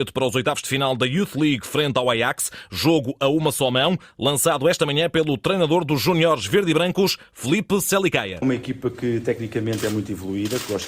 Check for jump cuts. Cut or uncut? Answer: uncut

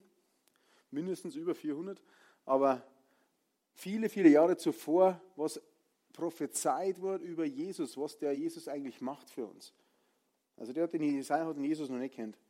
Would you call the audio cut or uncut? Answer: uncut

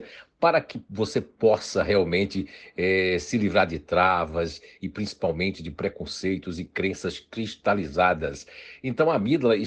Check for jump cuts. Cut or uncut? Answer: uncut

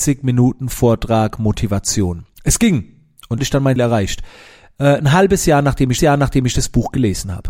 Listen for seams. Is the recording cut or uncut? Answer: cut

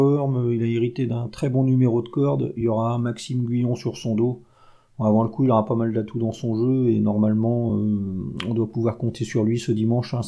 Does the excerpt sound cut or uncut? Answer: uncut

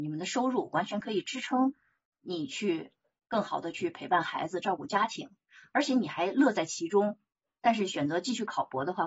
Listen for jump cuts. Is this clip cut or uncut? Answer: uncut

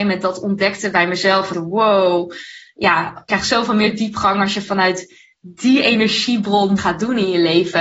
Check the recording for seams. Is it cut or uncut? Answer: cut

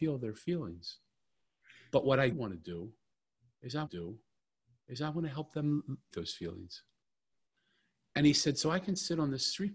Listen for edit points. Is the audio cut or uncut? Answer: cut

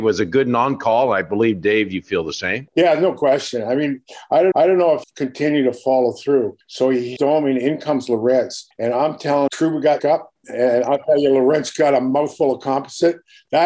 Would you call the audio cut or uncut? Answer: cut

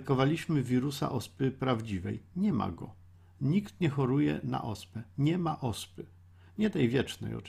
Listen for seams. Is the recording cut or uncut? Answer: uncut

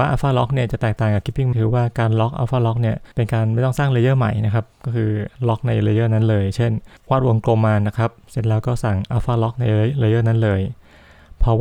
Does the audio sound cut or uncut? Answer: cut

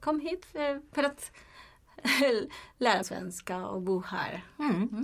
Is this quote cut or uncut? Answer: cut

